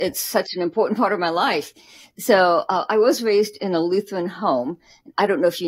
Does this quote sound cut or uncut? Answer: uncut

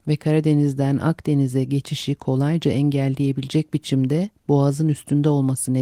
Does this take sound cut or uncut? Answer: uncut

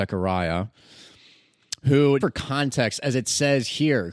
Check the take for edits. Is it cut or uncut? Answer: cut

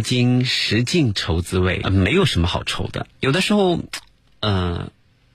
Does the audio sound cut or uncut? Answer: cut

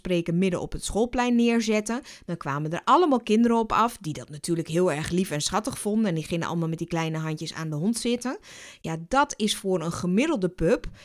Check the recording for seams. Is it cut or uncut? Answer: uncut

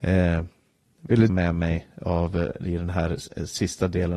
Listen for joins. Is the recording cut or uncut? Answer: cut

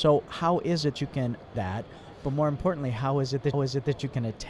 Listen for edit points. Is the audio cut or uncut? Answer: cut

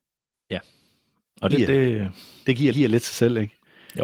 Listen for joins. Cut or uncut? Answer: cut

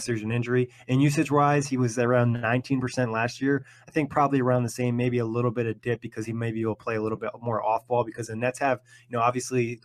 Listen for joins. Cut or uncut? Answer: uncut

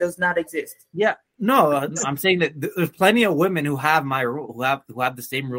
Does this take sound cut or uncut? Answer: uncut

